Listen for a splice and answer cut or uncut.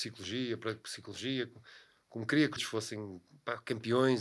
cut